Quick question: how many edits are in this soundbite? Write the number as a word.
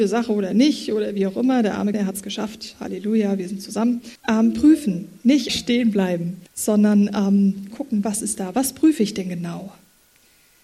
five